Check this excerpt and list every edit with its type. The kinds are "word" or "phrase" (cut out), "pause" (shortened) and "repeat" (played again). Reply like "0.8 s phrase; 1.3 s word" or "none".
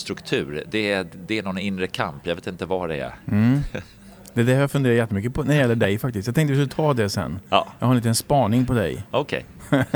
7.5 s pause